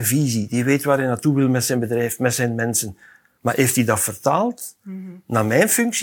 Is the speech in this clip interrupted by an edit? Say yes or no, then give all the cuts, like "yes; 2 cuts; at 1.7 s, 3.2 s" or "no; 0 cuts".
no; 0 cuts